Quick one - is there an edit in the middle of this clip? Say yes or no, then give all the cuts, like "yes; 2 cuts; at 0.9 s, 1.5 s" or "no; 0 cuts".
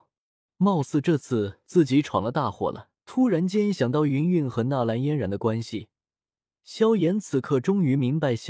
yes; 1 cut; at 3.0 s